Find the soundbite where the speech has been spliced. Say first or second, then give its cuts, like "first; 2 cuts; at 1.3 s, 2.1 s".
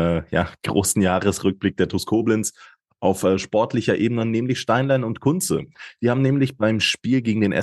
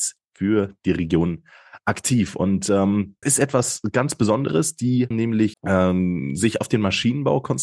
second; 3 cuts; at 3.2 s, 5.1 s, 5.5 s